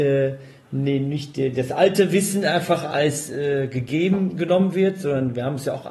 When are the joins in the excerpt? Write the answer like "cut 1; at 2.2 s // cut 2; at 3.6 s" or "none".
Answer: none